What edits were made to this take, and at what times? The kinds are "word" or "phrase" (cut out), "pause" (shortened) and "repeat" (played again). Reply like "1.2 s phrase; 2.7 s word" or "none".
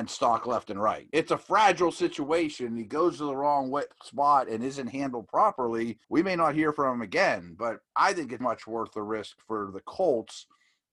1.1 s word; 6.0 s pause; 8.4 s word